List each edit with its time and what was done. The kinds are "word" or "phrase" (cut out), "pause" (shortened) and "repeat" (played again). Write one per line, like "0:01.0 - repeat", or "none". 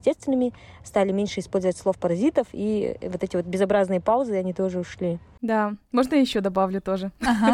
none